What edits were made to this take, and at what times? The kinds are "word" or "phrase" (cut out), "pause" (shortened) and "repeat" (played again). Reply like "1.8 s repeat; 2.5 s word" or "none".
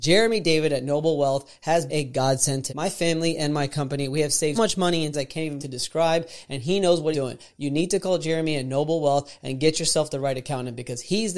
1.9 s word; 2.7 s word; 4.5 s word; 5.1 s word; 5.6 s word; 7.1 s word